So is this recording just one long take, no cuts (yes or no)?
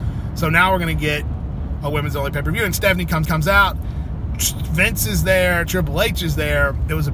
no